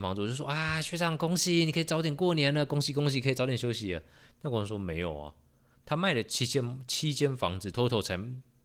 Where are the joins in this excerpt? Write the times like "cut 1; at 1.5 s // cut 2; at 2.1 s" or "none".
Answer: cut 1; at 7.7 s